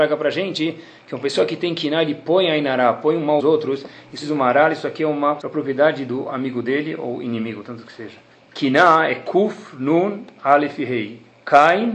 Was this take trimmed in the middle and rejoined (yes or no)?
yes